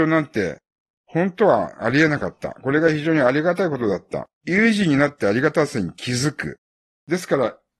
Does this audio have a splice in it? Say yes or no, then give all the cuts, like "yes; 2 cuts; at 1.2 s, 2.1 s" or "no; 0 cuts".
yes; 2 cuts; at 4.4 s, 6.7 s